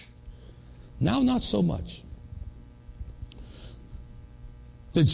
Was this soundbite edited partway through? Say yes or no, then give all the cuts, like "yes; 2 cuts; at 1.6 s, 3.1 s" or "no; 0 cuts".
no; 0 cuts